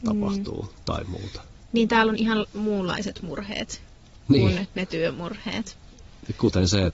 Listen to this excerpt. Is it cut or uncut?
uncut